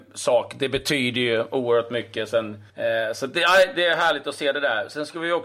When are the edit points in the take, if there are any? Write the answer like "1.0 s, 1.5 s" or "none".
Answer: 2.7 s